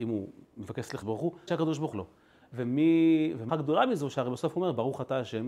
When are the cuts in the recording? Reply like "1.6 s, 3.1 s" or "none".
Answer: 1.0 s, 1.5 s, 1.9 s, 3.5 s